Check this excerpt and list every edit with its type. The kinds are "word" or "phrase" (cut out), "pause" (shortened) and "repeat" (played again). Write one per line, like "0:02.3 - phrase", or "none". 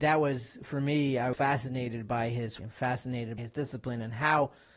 0:01.3 - word
0:02.6 - word
0:03.4 - word